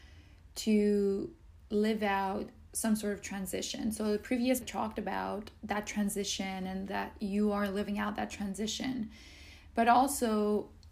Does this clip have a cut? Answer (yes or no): yes